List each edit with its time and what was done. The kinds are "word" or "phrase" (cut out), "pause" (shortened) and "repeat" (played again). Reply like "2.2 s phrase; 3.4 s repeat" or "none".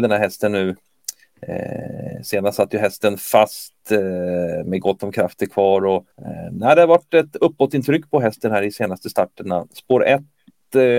6.1 s pause